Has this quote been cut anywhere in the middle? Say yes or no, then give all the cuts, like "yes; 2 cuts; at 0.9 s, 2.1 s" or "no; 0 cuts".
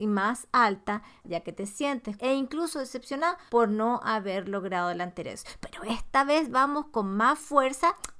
yes; 2 cuts; at 2.2 s, 3.5 s